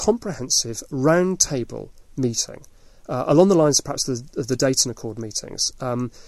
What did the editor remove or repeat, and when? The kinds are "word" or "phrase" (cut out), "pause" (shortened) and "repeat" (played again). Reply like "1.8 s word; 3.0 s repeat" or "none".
none